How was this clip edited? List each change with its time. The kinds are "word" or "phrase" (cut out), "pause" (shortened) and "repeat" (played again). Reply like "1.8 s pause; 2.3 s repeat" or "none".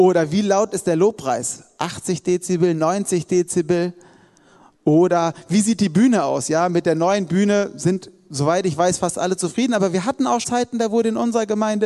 10.4 s word